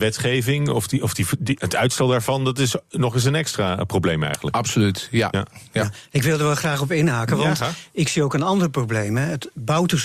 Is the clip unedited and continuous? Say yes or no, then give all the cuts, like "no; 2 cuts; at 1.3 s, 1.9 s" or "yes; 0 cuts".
yes; 0 cuts